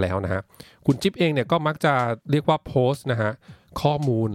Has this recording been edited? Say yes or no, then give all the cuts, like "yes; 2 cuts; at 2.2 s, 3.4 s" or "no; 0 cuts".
yes; 1 cut; at 2.2 s